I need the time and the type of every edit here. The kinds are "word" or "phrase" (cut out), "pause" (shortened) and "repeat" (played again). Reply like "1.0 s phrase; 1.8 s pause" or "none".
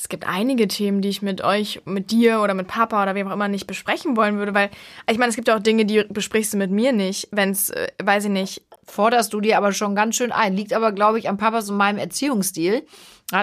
none